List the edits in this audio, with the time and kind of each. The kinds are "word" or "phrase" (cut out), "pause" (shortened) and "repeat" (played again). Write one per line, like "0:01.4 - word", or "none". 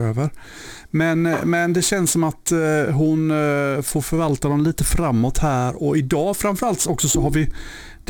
none